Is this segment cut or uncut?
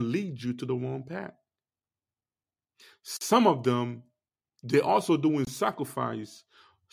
uncut